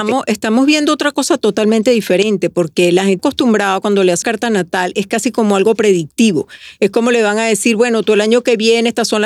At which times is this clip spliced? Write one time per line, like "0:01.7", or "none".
0:03.2
0:04.2